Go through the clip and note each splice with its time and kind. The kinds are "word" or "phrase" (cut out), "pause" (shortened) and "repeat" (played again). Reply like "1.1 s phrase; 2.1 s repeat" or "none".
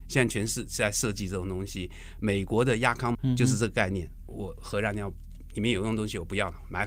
3.1 s word